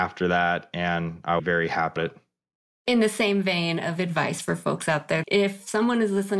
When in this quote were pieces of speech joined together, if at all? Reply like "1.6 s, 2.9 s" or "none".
1.4 s, 2.0 s, 5.2 s